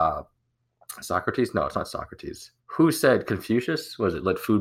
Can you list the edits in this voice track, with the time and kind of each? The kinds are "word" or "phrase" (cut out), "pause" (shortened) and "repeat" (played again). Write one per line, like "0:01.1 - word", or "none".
0:02.6 - pause